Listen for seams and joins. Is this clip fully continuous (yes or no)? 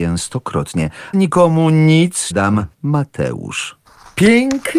no